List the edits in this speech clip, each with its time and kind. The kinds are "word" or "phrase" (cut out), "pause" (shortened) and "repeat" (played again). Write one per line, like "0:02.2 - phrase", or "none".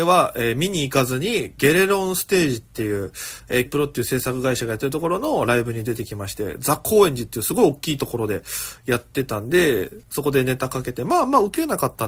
0:03.7 - word
0:10.0 - pause